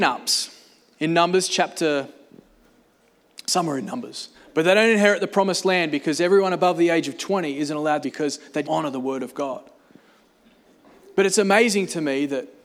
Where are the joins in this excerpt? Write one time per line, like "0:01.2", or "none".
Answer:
0:04.3
0:08.0
0:08.6